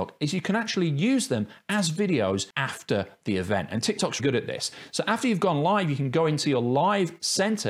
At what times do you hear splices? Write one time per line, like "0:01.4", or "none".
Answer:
0:04.2